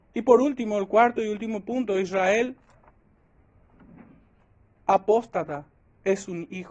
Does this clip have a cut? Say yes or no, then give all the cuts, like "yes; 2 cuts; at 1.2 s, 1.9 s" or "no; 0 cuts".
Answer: no; 0 cuts